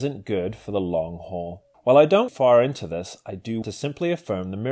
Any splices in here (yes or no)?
yes